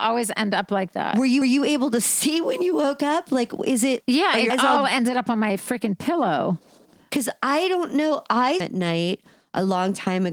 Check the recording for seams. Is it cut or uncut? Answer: cut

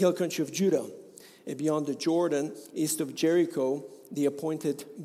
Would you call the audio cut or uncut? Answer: uncut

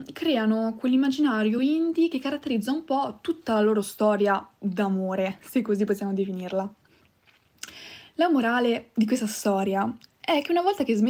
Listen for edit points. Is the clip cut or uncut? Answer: uncut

